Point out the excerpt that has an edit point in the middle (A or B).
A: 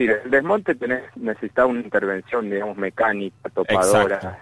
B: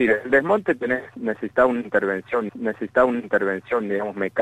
B